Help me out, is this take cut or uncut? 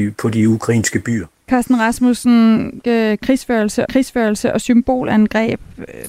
cut